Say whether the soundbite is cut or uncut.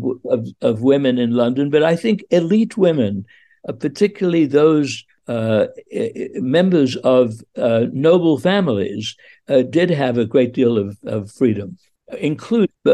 uncut